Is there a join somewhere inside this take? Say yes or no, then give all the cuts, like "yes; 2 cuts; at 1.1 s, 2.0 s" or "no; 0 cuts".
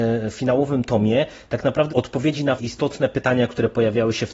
yes; 2 cuts; at 1.9 s, 2.6 s